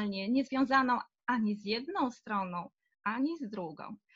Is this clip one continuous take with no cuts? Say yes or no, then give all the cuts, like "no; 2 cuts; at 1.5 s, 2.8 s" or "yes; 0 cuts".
yes; 0 cuts